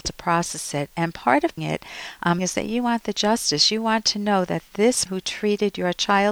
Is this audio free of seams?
no; 3 cuts; at 1.6 s, 2.4 s, 5.1 s

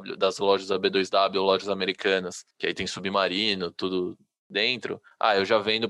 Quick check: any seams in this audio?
no; 0 cuts

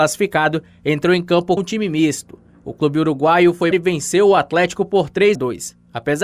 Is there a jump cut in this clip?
yes; 3 cuts; at 1.6 s, 3.7 s, 5.3 s

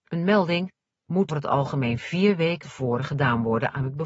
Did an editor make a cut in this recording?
yes; 2 cuts; at 1.3 s, 2.6 s

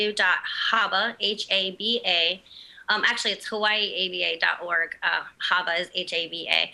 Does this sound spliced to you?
no; 0 cuts

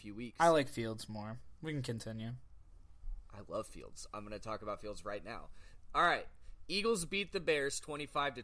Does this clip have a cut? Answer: no; 0 cuts

